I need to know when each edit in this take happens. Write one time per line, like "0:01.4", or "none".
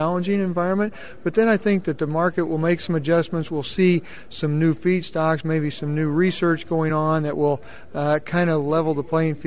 none